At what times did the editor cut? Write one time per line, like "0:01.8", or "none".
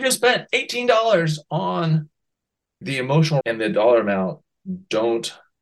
0:02.8
0:03.4